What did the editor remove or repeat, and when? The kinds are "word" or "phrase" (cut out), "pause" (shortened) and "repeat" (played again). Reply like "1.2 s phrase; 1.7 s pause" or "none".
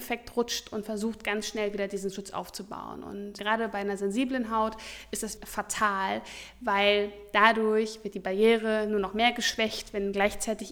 3.4 s word; 5.4 s word